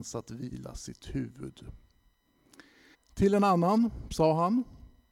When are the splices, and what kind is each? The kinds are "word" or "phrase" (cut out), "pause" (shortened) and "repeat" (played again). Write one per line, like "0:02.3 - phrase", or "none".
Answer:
0:02.9 - pause